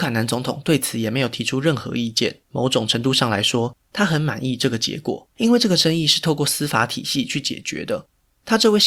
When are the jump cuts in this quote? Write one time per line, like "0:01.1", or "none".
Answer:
0:02.4
0:05.3